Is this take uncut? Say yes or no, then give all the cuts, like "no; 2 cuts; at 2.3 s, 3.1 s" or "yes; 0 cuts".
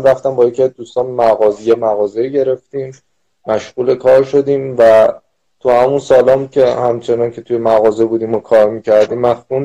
yes; 0 cuts